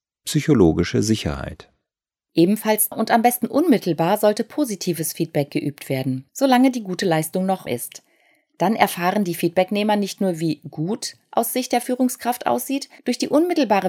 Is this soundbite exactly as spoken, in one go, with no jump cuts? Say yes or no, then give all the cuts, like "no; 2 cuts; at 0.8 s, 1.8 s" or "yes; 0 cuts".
no; 4 cuts; at 2.9 s, 6.3 s, 7.7 s, 13.0 s